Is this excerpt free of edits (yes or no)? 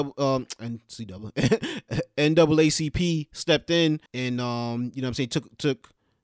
no